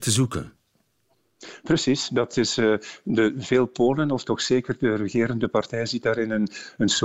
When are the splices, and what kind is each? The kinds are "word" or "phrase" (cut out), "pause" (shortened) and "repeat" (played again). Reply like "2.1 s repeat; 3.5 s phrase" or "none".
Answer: none